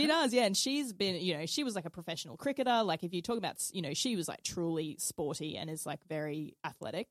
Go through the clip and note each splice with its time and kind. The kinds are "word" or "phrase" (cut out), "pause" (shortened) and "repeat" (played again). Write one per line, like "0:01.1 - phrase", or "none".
none